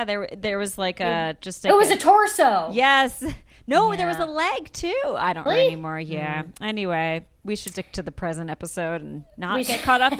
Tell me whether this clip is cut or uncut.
cut